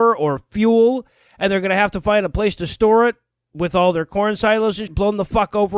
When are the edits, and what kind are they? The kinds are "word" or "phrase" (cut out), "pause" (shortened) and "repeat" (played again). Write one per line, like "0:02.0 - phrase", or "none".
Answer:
0:04.9 - word